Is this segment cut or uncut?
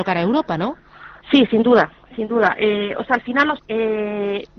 cut